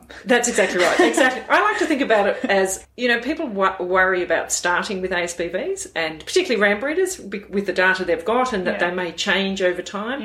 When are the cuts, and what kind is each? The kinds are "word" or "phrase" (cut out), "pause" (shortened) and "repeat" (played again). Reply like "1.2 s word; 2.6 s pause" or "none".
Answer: none